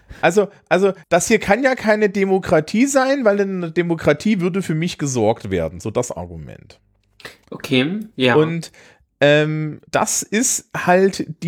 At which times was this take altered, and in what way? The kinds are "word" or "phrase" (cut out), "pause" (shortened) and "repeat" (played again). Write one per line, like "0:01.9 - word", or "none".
0:01.0 - pause
0:09.9 - pause